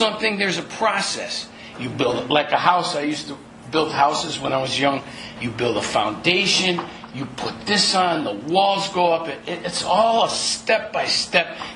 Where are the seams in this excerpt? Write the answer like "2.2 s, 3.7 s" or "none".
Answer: none

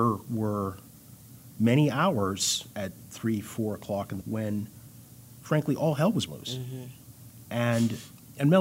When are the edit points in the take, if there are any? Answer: 4.2 s, 6.3 s

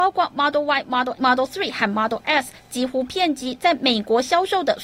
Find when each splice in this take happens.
1.2 s

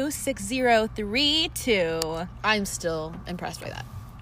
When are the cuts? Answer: none

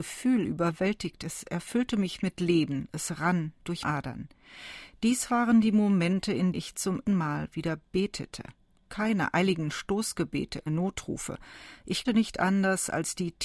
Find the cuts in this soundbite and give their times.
1.2 s, 3.8 s, 6.5 s, 7.1 s, 10.7 s, 12.0 s

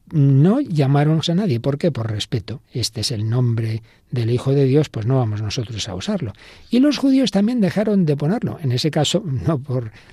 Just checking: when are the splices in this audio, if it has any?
1.2 s, 2.6 s

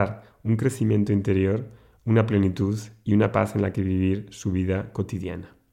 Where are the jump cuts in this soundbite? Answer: none

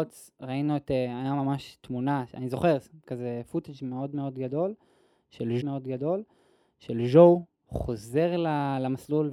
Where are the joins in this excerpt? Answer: 5.6 s

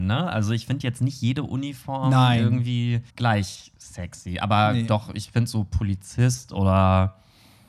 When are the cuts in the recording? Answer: 3.1 s

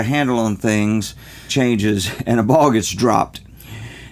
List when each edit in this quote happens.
1.5 s

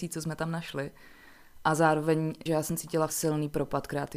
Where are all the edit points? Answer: 2.5 s, 3.1 s

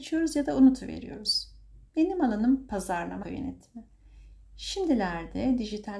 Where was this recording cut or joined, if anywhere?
1.9 s, 3.2 s

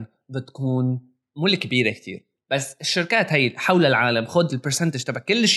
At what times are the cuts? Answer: none

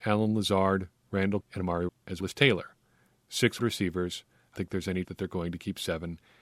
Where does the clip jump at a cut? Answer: 1.4 s, 1.9 s, 2.2 s, 3.6 s, 4.6 s, 5.0 s

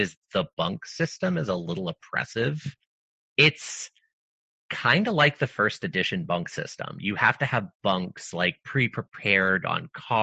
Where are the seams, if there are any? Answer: none

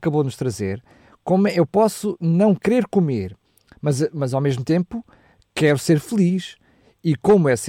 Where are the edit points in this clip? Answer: none

